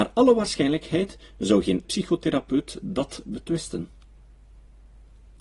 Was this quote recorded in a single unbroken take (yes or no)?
no